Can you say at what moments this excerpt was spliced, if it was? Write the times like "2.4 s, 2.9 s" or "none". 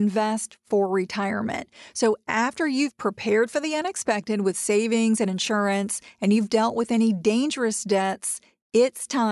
none